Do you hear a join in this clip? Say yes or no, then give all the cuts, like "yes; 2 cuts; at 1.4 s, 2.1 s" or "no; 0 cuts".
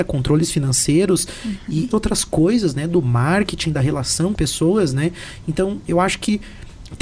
yes; 2 cuts; at 1.9 s, 4.3 s